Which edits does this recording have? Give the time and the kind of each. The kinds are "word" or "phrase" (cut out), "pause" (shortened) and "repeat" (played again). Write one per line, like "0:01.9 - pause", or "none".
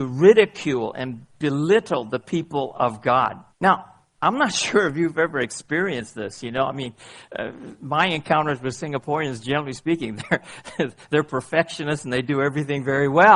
0:03.5 - pause